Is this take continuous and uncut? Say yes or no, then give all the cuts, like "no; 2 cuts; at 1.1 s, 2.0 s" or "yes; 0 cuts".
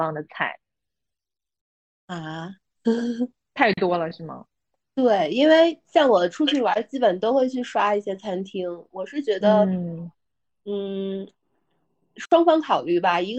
yes; 0 cuts